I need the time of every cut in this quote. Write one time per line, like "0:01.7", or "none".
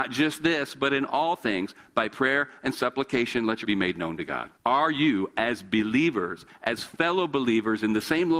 0:03.6
0:04.6